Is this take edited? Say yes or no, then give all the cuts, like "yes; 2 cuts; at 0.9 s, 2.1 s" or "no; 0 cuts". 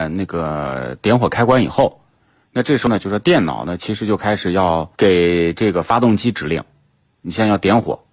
yes; 1 cut; at 4.9 s